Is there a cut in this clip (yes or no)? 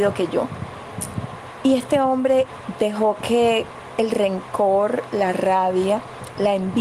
no